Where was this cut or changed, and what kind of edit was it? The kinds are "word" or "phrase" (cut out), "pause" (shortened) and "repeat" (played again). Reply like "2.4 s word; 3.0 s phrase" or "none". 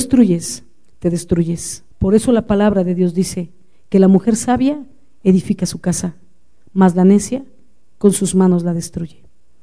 1.9 s pause